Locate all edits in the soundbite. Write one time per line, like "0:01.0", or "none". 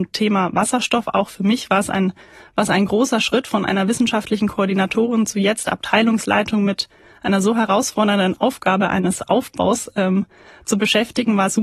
none